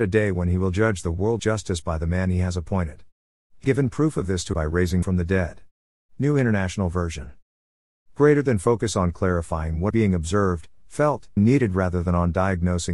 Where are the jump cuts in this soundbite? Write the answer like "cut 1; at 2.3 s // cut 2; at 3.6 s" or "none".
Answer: cut 1; at 1.4 s // cut 2; at 3.6 s // cut 3; at 4.5 s // cut 4; at 5.0 s // cut 5; at 9.9 s // cut 6; at 11.4 s